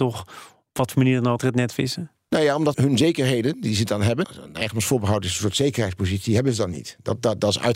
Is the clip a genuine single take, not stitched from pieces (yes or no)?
no